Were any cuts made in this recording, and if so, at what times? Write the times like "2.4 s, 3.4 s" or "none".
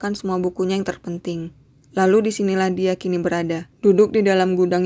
none